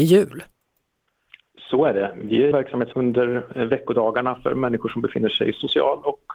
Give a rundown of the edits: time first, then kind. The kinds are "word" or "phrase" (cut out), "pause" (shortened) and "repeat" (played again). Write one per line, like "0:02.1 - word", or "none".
0:02.5 - phrase
0:02.9 - phrase